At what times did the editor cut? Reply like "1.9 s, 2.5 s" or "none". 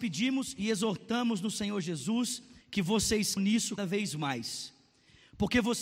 2.6 s, 3.4 s, 3.8 s